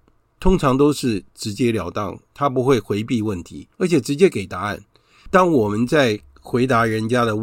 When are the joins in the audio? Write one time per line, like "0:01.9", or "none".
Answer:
0:03.7